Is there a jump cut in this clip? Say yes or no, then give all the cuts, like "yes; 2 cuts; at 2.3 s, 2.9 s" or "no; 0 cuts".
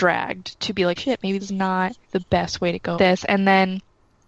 yes; 4 cuts; at 1.0 s, 1.4 s, 2.0 s, 3.0 s